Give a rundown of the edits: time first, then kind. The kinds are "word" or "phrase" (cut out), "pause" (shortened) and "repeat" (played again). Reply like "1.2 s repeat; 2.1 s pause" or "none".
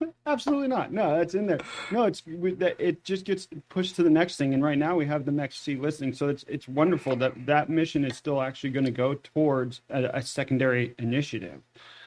none